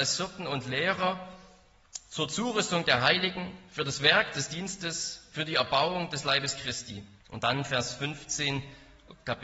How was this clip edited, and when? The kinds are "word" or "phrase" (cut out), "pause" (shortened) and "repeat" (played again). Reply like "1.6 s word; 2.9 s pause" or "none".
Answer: 7.2 s pause